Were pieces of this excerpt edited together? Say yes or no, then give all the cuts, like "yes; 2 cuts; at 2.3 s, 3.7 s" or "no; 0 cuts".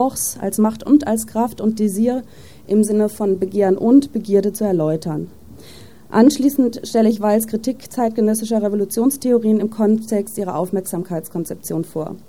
no; 0 cuts